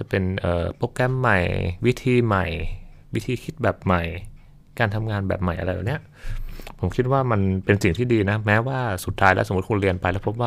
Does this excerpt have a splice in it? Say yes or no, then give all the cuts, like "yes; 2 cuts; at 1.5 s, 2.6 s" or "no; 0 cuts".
yes; 1 cut; at 3.0 s